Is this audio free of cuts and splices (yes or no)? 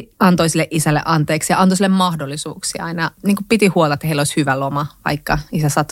yes